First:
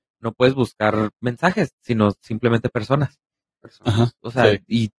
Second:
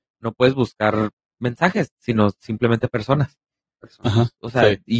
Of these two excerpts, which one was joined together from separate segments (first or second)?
first